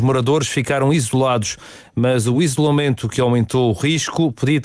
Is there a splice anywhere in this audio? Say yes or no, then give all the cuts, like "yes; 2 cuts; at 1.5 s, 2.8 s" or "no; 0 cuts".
no; 0 cuts